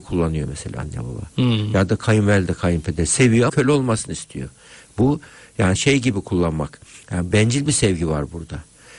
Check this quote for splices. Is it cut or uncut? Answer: cut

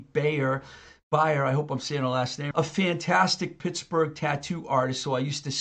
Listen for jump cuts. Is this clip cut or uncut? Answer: cut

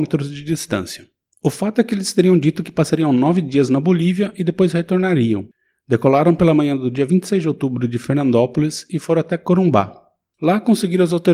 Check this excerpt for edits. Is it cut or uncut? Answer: uncut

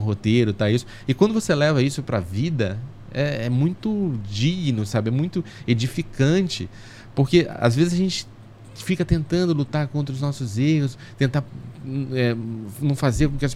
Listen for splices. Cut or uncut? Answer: uncut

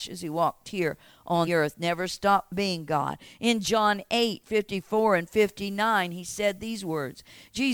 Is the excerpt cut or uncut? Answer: cut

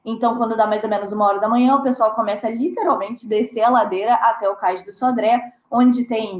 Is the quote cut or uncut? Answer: uncut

